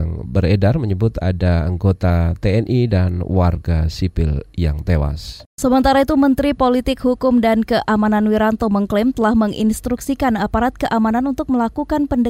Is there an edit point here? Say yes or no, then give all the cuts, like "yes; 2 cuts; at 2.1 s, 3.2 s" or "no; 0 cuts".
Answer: no; 0 cuts